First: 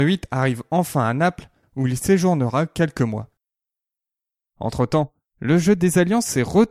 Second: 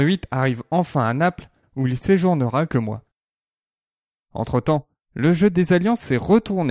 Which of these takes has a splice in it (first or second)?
second